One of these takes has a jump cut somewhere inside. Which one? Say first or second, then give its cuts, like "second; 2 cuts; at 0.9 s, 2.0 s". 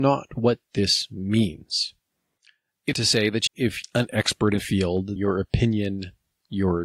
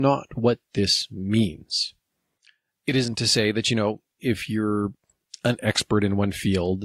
first; 5 cuts; at 2.9 s, 3.5 s, 3.8 s, 4.6 s, 5.2 s